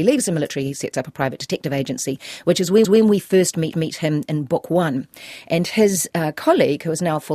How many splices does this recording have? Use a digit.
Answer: 2